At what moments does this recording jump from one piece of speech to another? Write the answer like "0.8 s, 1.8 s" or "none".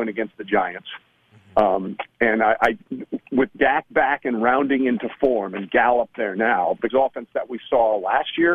6.9 s